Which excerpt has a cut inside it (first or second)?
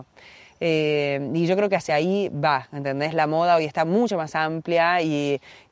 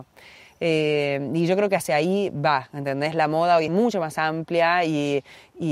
second